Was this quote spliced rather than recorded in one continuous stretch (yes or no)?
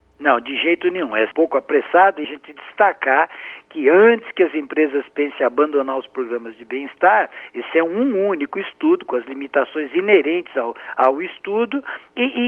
yes